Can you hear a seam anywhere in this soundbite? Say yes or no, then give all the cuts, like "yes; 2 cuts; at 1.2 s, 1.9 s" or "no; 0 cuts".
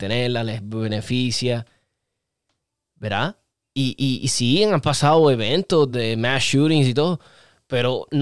no; 0 cuts